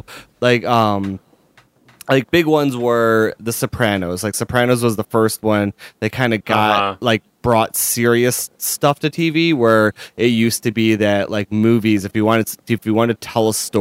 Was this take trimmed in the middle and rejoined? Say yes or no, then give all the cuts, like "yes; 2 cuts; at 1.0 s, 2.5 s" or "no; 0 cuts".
no; 0 cuts